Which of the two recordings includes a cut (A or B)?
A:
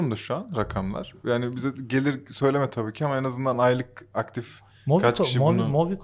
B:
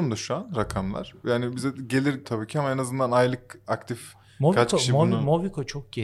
B